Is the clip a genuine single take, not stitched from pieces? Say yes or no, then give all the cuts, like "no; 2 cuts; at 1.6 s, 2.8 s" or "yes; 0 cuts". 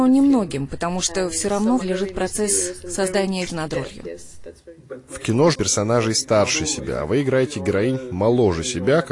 no; 3 cuts; at 1.8 s, 3.5 s, 5.5 s